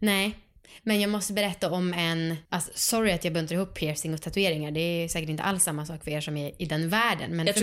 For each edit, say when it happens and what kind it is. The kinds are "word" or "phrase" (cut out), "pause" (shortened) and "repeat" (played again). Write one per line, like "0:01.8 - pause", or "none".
0:02.5 - pause